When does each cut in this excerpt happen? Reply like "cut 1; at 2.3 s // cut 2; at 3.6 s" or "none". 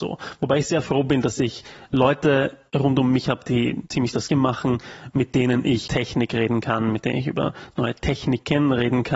cut 1; at 4.3 s // cut 2; at 5.9 s